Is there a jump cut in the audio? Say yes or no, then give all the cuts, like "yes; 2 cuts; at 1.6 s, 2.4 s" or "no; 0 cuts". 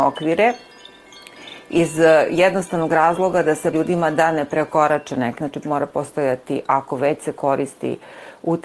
yes; 2 cuts; at 3.7 s, 5.4 s